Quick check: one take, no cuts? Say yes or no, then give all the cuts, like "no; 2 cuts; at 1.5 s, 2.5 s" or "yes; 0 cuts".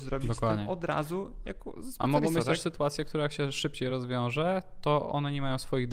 yes; 0 cuts